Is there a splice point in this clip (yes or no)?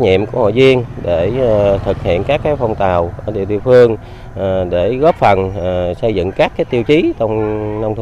no